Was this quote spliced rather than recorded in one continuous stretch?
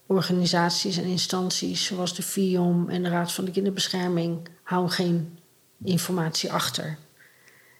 yes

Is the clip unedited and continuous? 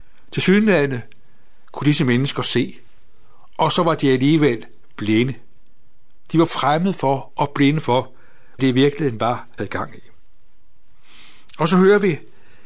no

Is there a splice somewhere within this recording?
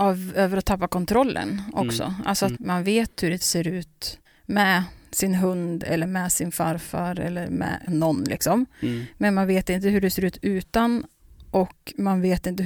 yes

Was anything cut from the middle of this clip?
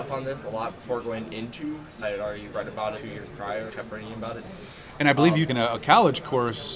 yes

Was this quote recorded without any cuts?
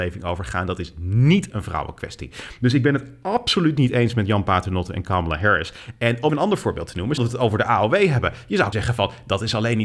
no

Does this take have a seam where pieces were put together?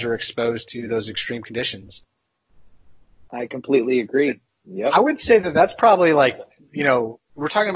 no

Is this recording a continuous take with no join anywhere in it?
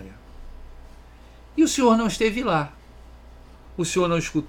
yes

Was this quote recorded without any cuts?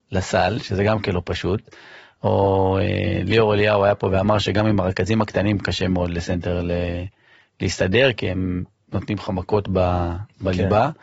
yes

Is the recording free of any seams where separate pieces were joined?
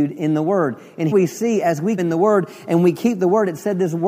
no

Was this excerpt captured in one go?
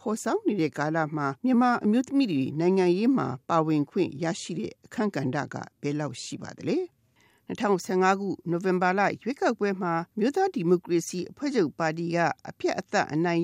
no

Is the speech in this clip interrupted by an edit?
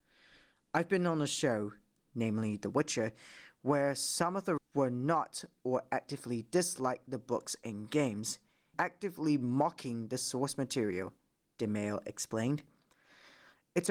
yes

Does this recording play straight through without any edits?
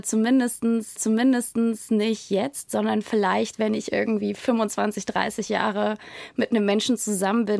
no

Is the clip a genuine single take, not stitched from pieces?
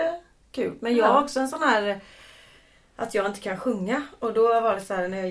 yes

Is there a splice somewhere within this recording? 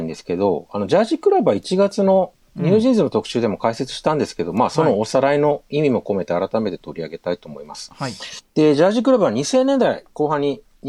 yes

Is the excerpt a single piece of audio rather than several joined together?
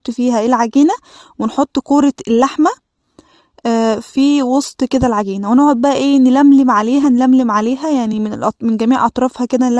yes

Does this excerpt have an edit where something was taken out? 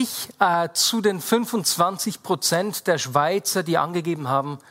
no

